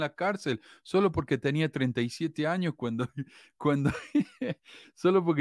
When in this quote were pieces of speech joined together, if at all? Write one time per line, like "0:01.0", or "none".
none